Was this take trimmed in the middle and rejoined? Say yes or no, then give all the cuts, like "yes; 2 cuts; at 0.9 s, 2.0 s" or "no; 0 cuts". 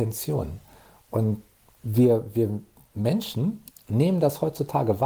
no; 0 cuts